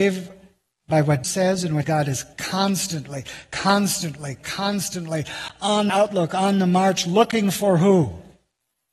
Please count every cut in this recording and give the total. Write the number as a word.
five